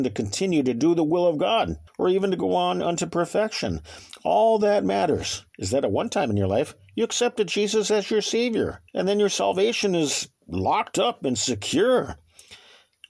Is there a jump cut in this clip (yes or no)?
yes